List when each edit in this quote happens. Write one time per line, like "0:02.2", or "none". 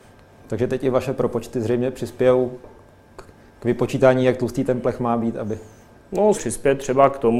0:03.4
0:06.3